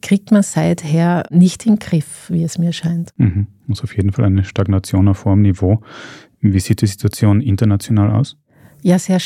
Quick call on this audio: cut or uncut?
uncut